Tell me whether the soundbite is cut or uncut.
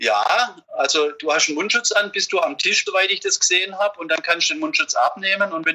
cut